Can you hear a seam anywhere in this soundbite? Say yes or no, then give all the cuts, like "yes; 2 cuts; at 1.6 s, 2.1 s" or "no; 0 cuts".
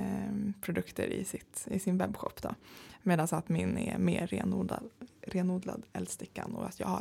no; 0 cuts